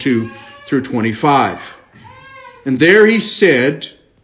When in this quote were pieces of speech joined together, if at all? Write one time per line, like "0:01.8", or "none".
none